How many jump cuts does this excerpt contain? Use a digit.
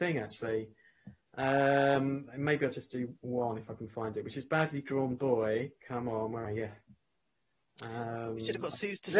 3